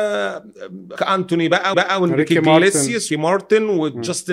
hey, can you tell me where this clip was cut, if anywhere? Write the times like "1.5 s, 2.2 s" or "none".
1.0 s, 1.7 s, 3.1 s